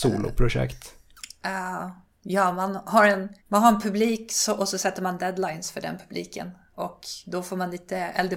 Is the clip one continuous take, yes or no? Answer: no